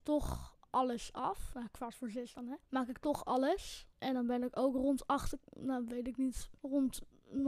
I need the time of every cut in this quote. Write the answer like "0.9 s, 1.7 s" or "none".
2.6 s, 3.9 s, 5.4 s, 6.6 s